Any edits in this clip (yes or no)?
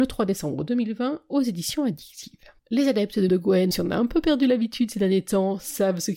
yes